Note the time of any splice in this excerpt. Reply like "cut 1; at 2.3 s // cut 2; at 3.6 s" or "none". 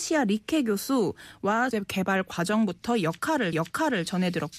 cut 1; at 1.7 s // cut 2; at 3.5 s